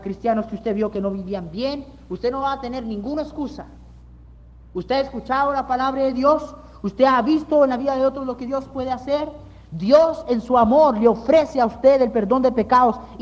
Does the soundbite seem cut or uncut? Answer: uncut